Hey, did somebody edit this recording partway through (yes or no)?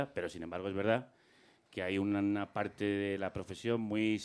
no